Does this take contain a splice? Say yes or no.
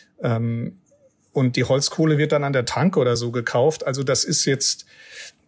no